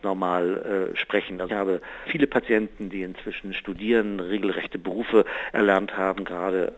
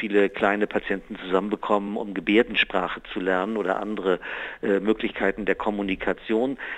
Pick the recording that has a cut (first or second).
first